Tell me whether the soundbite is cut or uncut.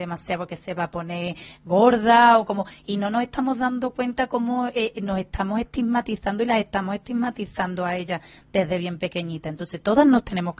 uncut